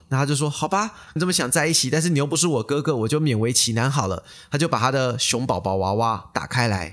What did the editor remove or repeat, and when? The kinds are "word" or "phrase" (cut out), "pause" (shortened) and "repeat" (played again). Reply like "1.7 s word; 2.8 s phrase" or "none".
1.2 s phrase